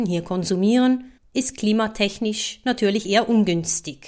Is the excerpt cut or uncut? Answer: cut